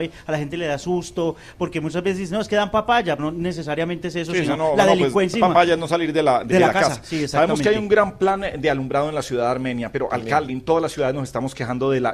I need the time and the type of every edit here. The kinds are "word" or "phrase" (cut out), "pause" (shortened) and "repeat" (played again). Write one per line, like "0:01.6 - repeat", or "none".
0:03.2 - word
0:05.3 - word
0:06.5 - word
0:10.5 - word